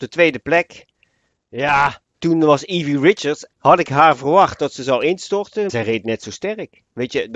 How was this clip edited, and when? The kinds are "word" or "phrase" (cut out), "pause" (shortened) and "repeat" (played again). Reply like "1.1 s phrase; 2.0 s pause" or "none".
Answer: 2.2 s word; 3.6 s word; 5.7 s word